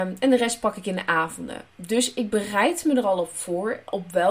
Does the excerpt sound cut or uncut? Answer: uncut